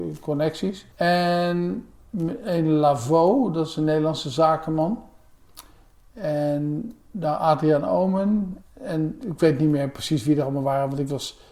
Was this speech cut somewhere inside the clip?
yes; 2 cuts; at 0.9 s, 8.6 s

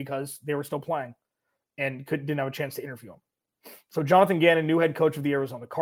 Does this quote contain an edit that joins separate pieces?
no; 0 cuts

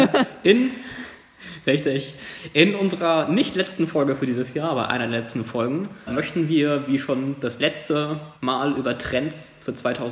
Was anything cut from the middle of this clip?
yes; 2 cuts; at 6.1 s, 8.4 s

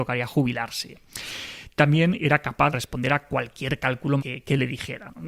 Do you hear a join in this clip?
yes; 2 cuts; at 2.7 s, 4.2 s

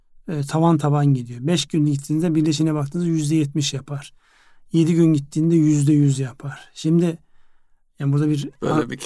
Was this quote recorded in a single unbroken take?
yes; 0 cuts

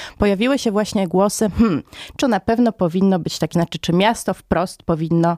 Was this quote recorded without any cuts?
no; 2 cuts; at 2.2 s, 3.5 s

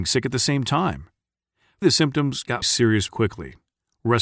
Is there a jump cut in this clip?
yes; 3 cuts; at 1.8 s, 2.6 s, 3.1 s

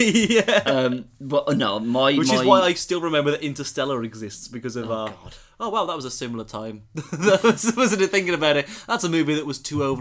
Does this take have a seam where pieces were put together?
no; 0 cuts

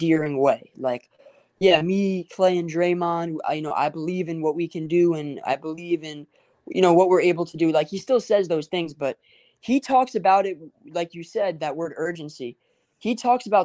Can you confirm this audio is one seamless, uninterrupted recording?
yes; 0 cuts

